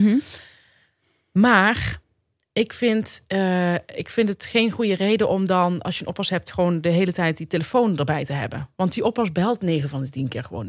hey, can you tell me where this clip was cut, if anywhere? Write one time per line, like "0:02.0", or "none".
none